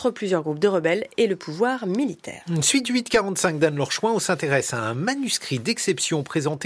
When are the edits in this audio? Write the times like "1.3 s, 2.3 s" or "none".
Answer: none